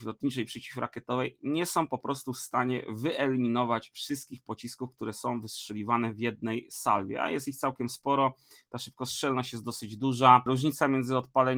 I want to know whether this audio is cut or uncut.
uncut